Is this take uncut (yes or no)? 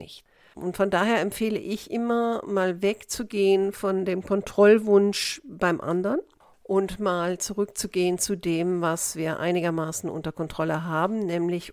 yes